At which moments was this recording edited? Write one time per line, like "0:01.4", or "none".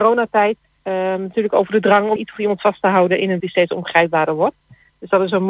0:02.2
0:03.4